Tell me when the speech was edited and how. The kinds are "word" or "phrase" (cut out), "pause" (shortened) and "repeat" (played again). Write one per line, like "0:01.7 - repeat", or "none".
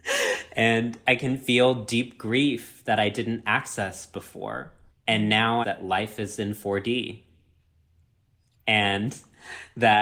0:04.9 - pause
0:05.6 - phrase